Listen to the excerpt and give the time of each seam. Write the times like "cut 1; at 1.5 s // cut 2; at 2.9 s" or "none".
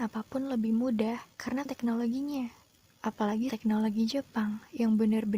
cut 1; at 1.7 s // cut 2; at 3.5 s